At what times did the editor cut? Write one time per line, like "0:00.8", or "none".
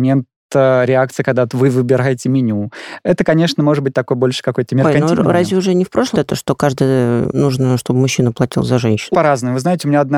0:06.1
0:07.3
0:09.1

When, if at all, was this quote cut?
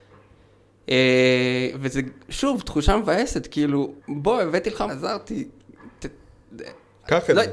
0:04.0
0:04.9

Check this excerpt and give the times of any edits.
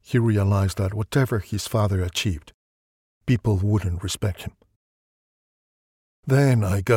none

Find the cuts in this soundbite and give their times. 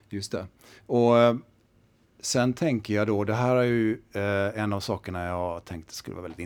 none

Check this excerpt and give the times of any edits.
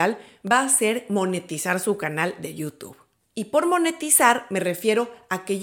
none

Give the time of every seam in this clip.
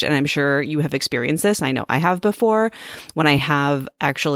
none

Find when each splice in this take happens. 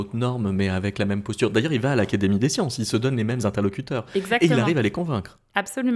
none

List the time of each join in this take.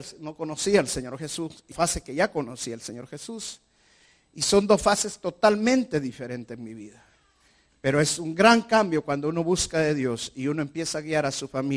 0:01.7

